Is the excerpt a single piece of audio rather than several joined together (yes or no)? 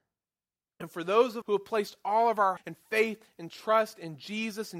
no